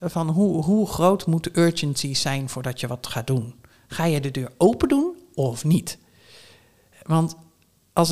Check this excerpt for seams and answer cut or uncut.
uncut